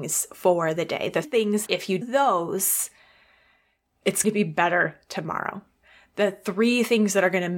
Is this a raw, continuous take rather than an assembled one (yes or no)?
no